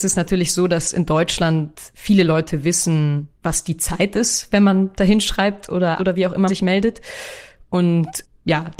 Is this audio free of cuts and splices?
no; 3 cuts; at 3.3 s, 6.0 s, 6.5 s

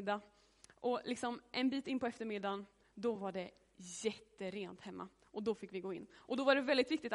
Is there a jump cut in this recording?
no; 0 cuts

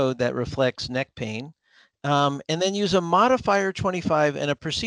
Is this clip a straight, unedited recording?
yes; 0 cuts

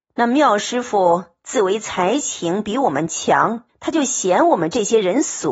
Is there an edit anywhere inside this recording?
yes; 1 cut; at 3.7 s

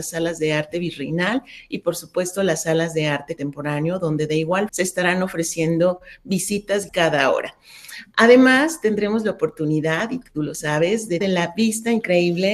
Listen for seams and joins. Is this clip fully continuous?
no; 4 cuts; at 3.4 s, 4.7 s, 6.9 s, 11.2 s

